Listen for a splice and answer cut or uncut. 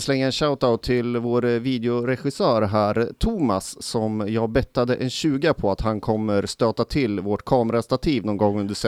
uncut